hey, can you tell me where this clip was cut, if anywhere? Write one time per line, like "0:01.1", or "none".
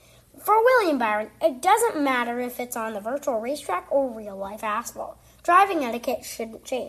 none